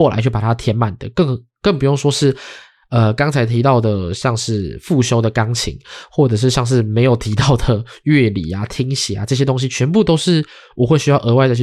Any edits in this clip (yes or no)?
no